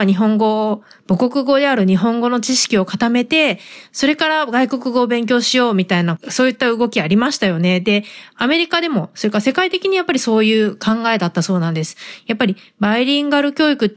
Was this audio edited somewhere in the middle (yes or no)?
no